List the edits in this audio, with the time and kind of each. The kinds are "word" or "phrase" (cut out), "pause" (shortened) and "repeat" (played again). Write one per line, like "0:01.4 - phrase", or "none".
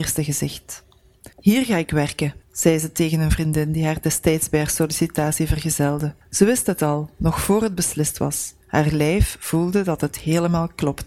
0:01.3 - pause
0:02.4 - pause
0:06.2 - pause
0:08.6 - pause